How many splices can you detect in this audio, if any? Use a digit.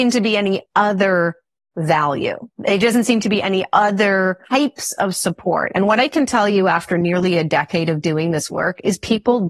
2